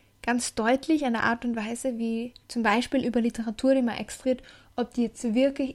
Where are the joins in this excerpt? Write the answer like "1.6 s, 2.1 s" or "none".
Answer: 2.4 s, 3.0 s, 4.2 s